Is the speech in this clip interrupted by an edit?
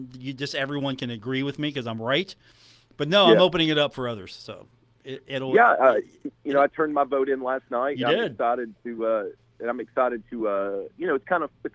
no; 0 cuts

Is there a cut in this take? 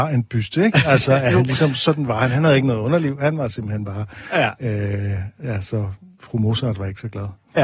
no; 0 cuts

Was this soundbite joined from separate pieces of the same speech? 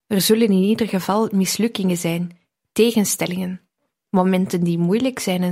no; 0 cuts

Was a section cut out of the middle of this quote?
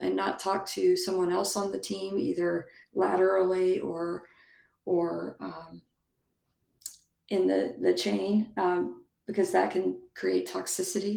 no; 0 cuts

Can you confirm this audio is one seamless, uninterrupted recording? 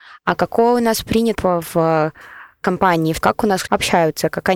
no; 3 cuts; at 1.4 s, 3.2 s, 3.7 s

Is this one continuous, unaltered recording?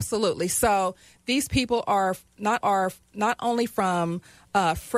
no; 1 cut; at 2.6 s

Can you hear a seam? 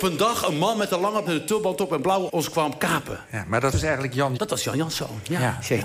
yes; 4 cuts; at 1.3 s, 2.3 s, 3.7 s, 4.4 s

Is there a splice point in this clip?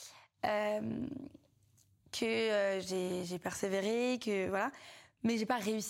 no; 0 cuts

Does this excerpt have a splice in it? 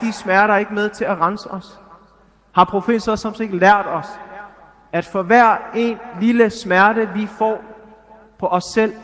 no; 0 cuts

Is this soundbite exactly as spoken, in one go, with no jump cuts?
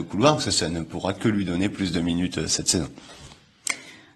yes; 0 cuts

